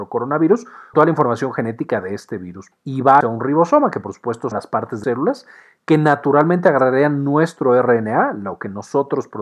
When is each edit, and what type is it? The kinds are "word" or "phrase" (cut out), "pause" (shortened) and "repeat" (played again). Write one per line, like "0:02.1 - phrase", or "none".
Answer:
0:00.9 - word
0:02.7 - word
0:03.2 - word
0:04.5 - word
0:05.0 - word

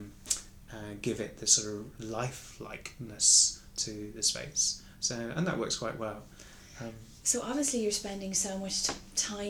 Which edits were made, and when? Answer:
none

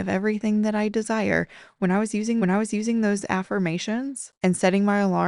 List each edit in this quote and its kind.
0:02.4 - repeat
0:04.4 - pause

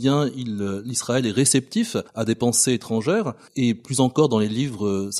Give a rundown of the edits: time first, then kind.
0:02.1 - pause

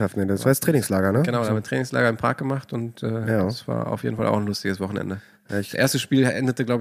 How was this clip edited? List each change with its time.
none

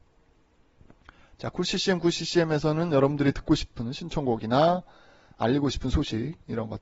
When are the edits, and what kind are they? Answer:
none

